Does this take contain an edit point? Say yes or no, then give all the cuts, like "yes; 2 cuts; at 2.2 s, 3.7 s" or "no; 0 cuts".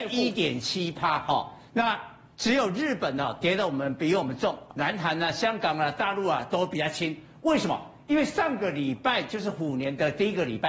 yes; 1 cut; at 4.7 s